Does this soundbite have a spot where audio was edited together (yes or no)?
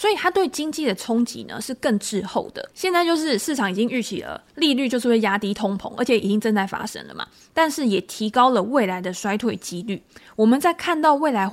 yes